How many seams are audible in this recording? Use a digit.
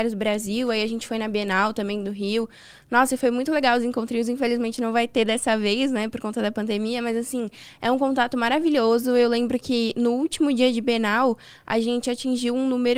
0